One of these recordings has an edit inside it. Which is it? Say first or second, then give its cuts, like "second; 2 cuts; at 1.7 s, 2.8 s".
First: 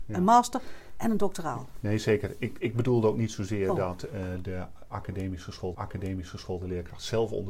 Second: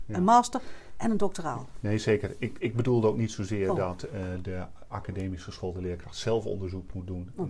first; 1 cut; at 5.7 s